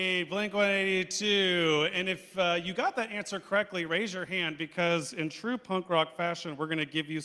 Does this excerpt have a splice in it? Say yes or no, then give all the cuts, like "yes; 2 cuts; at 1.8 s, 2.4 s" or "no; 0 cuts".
no; 0 cuts